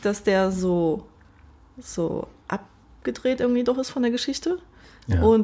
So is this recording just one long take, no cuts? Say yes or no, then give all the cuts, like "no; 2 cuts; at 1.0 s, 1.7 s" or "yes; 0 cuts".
yes; 0 cuts